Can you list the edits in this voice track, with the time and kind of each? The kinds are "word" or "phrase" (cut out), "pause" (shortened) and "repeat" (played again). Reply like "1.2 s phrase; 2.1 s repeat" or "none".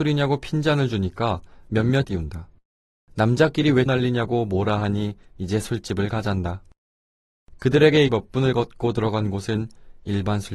2.0 s phrase; 3.9 s word; 8.1 s word